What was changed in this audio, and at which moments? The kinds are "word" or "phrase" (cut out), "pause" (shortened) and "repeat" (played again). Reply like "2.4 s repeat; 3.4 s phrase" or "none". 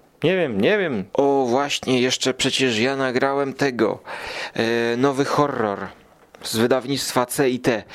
1.1 s pause

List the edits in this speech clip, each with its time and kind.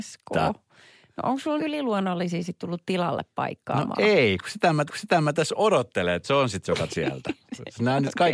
1.6 s word; 4.9 s repeat; 6.2 s word; 6.9 s word

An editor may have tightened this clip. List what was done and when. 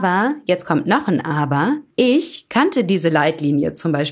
1.9 s pause

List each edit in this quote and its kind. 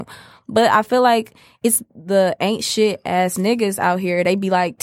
1.9 s pause

